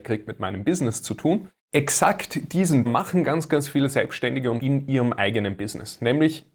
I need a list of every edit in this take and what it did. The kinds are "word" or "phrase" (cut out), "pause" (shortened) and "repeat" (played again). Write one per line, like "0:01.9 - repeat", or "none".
0:01.6 - pause
0:02.9 - word
0:04.6 - word